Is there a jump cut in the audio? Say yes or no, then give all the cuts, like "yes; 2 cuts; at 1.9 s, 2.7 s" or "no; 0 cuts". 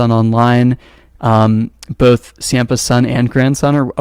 no; 0 cuts